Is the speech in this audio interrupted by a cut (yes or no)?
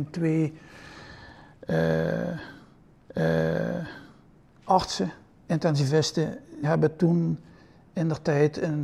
yes